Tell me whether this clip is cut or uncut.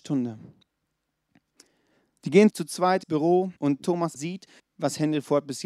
cut